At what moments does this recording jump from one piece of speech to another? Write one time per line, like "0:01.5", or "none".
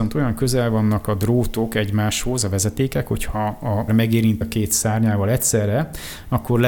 0:03.9
0:04.4